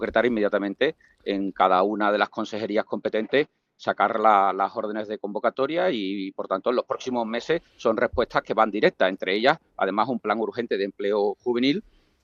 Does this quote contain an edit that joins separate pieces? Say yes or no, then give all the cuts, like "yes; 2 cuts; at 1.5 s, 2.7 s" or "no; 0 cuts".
no; 0 cuts